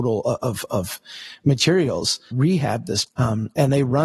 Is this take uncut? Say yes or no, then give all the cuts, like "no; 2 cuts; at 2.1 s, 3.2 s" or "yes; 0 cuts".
no; 2 cuts; at 2.3 s, 3.1 s